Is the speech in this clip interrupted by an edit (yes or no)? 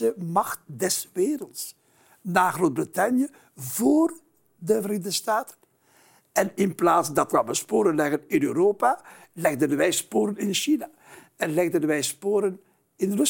yes